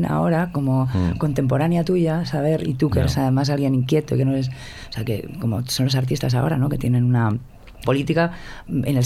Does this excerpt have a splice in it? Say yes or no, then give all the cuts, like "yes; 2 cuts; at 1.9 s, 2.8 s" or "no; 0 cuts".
yes; 1 cut; at 7.8 s